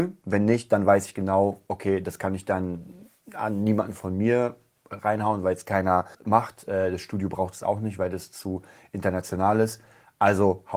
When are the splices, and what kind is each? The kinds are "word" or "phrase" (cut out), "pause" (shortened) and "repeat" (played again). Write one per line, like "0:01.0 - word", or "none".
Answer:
0:06.1 - pause

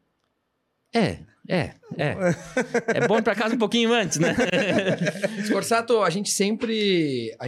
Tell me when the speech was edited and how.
none

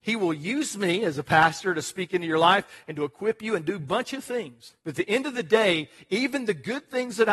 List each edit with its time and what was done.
0:04.8 - pause

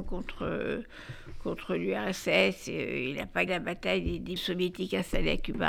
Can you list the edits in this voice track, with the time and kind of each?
0:03.5 - word
0:04.4 - word

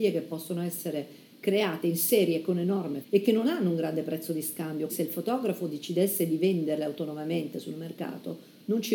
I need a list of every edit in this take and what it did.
0:03.0 - word
0:04.9 - word

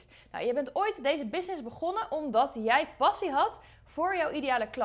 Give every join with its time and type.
none

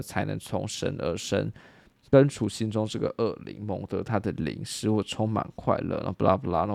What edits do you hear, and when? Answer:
none

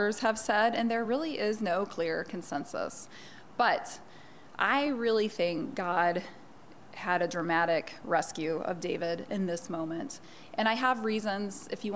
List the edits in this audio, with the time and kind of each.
none

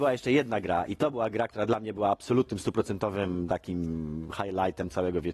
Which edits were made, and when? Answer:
none

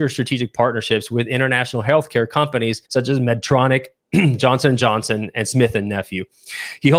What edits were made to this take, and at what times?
0:02.8 - pause

